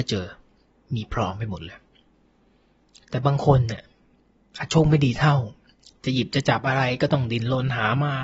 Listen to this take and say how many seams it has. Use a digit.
1